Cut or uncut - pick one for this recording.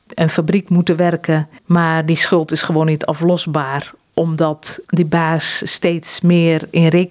cut